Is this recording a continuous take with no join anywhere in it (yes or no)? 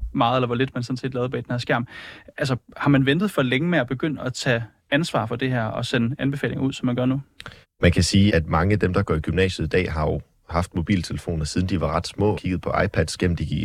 no